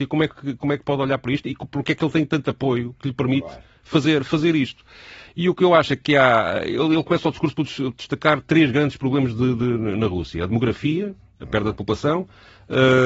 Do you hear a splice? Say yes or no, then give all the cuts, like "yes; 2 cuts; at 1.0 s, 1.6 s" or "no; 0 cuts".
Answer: no; 0 cuts